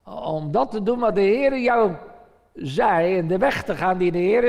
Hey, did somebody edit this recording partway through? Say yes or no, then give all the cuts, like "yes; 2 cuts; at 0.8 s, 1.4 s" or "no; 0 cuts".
no; 0 cuts